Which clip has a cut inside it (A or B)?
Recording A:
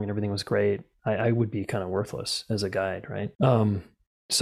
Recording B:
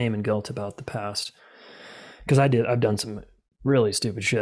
A